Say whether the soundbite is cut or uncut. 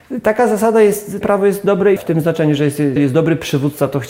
cut